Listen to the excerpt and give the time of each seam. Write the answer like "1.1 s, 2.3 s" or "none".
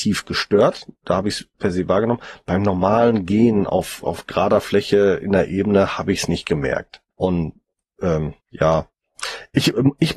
1.5 s, 7.1 s, 8.4 s